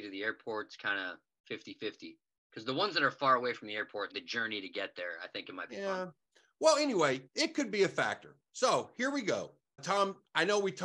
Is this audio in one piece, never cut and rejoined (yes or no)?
no